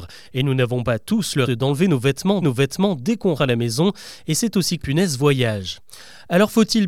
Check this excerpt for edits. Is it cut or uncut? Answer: cut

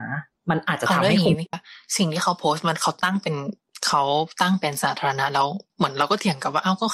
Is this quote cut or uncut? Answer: cut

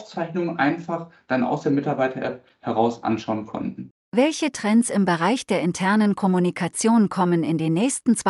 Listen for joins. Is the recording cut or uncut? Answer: cut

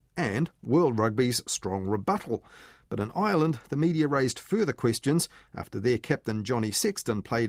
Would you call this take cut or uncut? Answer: uncut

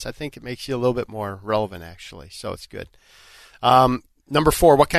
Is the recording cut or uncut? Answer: uncut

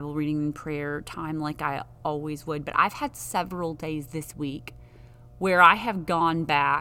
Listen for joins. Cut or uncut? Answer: uncut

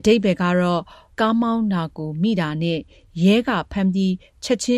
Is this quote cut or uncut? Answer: cut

